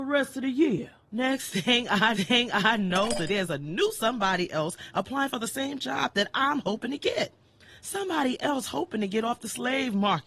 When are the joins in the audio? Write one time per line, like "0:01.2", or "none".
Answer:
0:02.1
0:03.3